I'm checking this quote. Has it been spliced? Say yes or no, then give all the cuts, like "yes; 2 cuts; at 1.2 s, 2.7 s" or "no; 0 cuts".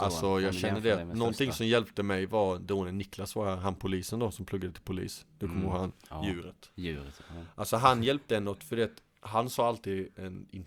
no; 0 cuts